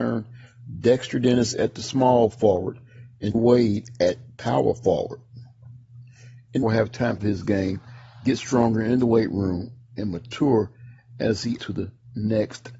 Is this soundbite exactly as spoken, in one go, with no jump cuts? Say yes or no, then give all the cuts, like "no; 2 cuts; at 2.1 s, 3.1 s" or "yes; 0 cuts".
no; 4 cuts; at 3.3 s, 6.6 s, 7.2 s, 11.6 s